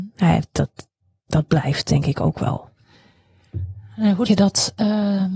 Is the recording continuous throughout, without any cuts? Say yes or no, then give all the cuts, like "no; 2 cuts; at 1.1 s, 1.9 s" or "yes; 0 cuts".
no; 1 cut; at 4.3 s